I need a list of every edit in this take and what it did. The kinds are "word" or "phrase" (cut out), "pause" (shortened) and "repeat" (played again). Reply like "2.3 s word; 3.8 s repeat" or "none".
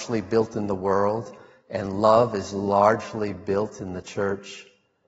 none